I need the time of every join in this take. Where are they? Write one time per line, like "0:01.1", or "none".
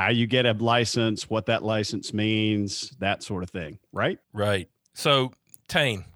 0:04.2